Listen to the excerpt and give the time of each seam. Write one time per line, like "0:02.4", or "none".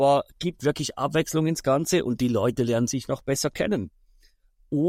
none